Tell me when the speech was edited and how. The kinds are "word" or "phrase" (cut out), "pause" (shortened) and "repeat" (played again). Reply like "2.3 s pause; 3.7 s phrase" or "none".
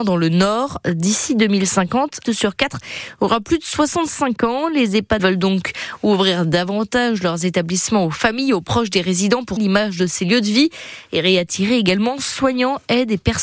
2.3 s phrase; 5.2 s word; 9.6 s word